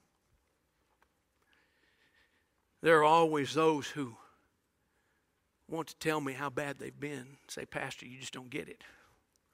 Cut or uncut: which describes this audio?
uncut